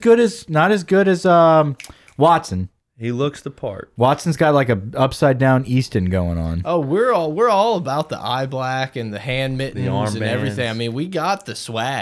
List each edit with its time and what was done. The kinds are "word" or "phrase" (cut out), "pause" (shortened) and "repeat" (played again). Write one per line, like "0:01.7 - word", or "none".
none